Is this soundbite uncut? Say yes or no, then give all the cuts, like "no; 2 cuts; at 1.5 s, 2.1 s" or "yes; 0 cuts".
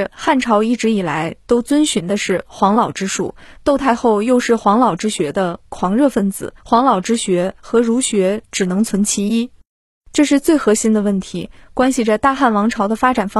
no; 1 cut; at 6.6 s